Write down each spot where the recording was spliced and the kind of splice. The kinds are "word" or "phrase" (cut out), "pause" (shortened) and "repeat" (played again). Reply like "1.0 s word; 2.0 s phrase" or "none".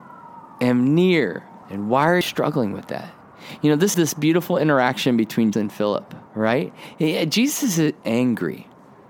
1.6 s pause; 2.2 s word; 3.9 s word; 5.5 s word; 6.3 s pause; 8.0 s word